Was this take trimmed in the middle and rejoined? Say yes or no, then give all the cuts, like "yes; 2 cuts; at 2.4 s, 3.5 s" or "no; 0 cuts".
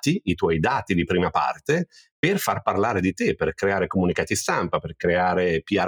no; 0 cuts